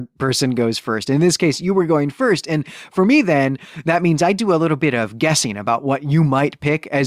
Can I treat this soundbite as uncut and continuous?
yes; 0 cuts

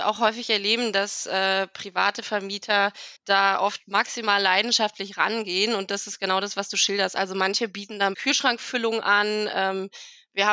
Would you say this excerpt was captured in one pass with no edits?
no; 2 cuts; at 3.2 s, 8.1 s

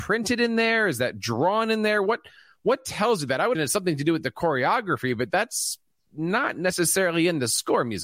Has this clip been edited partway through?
yes; 1 cut; at 3.5 s

